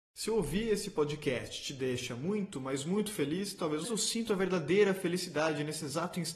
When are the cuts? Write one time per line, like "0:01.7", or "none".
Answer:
0:03.8